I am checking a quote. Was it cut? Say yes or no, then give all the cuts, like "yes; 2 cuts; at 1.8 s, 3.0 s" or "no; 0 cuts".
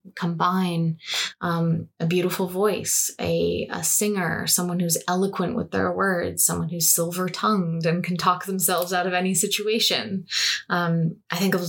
yes; 1 cut; at 1.9 s